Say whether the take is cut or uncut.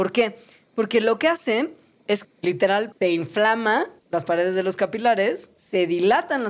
cut